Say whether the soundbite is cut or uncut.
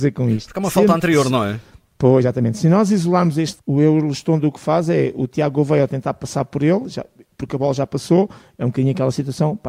cut